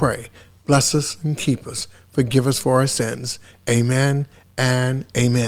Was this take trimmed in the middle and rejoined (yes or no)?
no